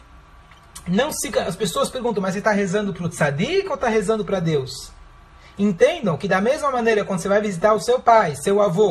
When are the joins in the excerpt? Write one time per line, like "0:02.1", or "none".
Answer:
none

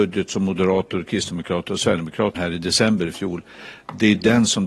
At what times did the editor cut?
0:02.3

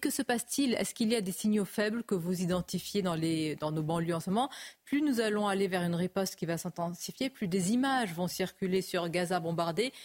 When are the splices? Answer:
none

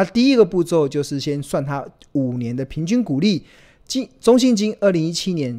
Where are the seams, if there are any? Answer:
none

